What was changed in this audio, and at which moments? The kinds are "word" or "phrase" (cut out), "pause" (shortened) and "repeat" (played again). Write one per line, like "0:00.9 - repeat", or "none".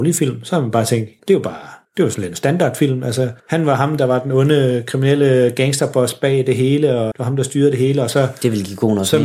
0:01.2 - word
0:01.8 - pause
0:03.4 - pause
0:07.1 - word